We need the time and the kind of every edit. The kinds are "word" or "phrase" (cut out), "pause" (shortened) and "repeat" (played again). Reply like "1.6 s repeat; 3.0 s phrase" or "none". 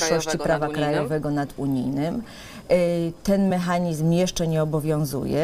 none